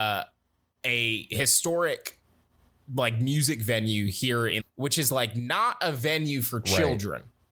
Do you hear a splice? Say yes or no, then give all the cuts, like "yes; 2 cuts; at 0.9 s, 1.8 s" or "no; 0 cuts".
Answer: yes; 1 cut; at 4.6 s